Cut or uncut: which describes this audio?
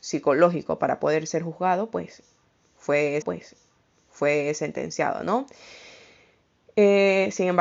cut